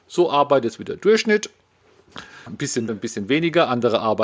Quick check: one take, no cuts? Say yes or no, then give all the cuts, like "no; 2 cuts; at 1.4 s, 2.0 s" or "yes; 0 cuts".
no; 2 cuts; at 2.5 s, 2.9 s